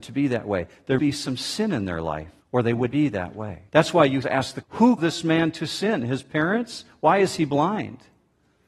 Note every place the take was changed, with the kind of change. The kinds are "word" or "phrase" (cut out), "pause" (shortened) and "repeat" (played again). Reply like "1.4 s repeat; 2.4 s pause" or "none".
1.0 s word; 2.4 s pause; 2.9 s word; 3.7 s pause; 4.2 s phrase; 4.6 s word; 5.0 s word